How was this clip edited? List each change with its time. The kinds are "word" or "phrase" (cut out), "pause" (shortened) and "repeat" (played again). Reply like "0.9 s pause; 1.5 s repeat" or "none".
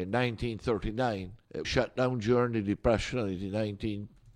1.6 s word